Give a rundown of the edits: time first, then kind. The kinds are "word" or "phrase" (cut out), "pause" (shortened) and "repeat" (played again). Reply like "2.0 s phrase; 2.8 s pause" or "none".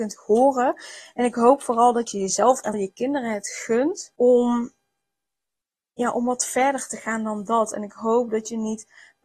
2.7 s word; 4.2 s pause